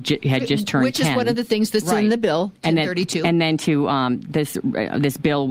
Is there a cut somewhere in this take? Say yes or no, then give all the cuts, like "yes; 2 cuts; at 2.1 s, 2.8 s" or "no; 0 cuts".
no; 0 cuts